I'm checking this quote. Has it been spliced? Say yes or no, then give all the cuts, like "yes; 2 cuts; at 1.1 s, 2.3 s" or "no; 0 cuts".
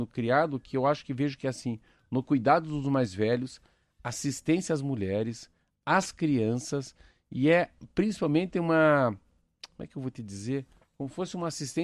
no; 0 cuts